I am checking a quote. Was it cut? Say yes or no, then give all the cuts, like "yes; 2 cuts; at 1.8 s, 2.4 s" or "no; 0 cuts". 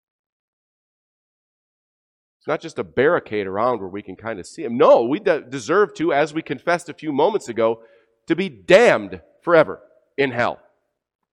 no; 0 cuts